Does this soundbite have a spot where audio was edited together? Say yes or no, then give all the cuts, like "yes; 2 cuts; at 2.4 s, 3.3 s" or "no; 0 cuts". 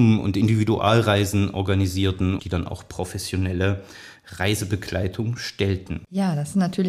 yes; 1 cut; at 2.4 s